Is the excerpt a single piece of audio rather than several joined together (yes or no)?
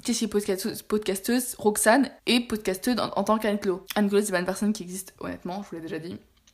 no